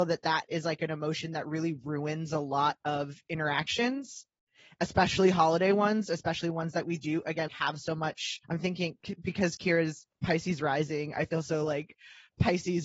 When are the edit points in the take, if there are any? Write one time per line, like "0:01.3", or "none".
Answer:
0:07.5
0:08.4